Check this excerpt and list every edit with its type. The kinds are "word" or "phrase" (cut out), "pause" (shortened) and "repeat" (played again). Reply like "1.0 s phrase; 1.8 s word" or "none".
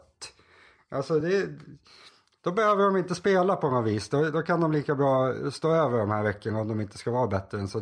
none